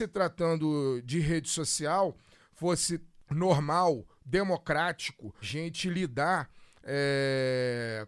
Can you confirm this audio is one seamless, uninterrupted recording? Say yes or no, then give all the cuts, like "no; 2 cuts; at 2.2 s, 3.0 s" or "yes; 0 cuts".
no; 1 cut; at 5.4 s